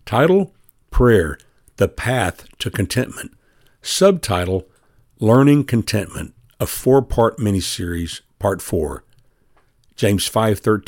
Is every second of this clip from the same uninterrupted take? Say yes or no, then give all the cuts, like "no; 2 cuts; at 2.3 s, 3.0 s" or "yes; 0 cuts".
yes; 0 cuts